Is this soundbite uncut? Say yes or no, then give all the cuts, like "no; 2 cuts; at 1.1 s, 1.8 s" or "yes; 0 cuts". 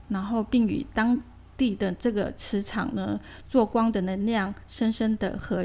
yes; 0 cuts